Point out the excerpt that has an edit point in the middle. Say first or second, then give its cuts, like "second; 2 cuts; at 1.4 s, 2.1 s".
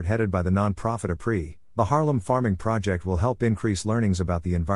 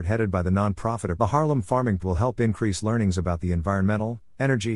second; 2 cuts; at 1.2 s, 2.0 s